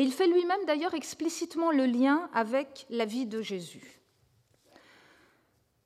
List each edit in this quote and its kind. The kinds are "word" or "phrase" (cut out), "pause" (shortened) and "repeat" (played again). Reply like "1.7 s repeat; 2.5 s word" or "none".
none